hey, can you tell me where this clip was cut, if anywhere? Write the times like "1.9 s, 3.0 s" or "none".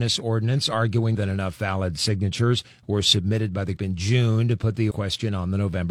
1.1 s, 3.8 s, 4.9 s